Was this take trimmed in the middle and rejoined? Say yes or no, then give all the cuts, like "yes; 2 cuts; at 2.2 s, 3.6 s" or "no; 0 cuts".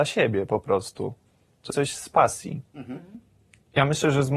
yes; 2 cuts; at 1.7 s, 2.7 s